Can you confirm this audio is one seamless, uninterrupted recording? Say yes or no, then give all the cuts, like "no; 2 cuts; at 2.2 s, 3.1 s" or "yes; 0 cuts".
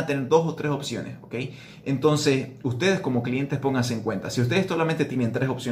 yes; 0 cuts